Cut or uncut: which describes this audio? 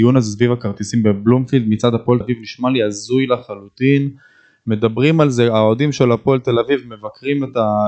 cut